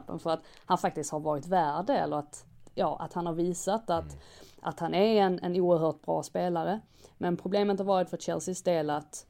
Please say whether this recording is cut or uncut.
uncut